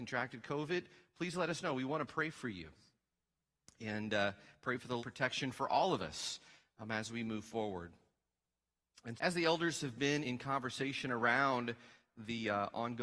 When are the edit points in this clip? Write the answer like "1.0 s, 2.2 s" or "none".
5.0 s, 9.2 s, 10.2 s